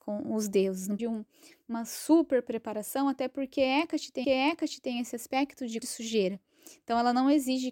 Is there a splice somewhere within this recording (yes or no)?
yes